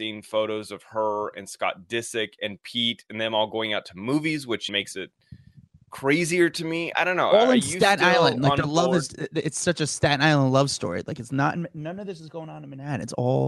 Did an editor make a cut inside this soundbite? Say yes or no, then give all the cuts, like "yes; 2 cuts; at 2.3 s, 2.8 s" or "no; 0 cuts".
yes; 2 cuts; at 4.7 s, 6.9 s